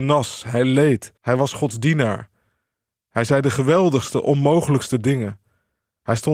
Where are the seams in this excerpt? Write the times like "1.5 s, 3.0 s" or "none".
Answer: 1.2 s